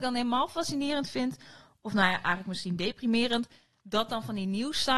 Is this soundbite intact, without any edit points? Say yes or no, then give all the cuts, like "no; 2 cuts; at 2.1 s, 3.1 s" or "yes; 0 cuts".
yes; 0 cuts